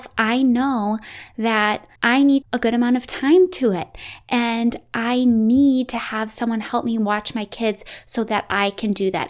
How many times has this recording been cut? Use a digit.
2